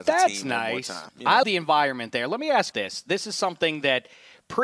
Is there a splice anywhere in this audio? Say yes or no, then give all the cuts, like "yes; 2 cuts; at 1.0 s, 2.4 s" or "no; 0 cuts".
yes; 2 cuts; at 1.4 s, 2.7 s